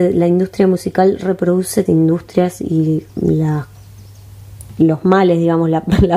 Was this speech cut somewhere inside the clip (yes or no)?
yes